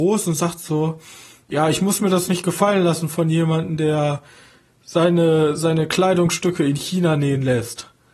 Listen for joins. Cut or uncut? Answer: uncut